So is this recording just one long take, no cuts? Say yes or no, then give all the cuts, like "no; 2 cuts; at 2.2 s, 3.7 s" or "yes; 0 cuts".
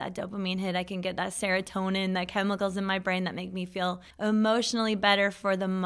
no; 1 cut; at 4.1 s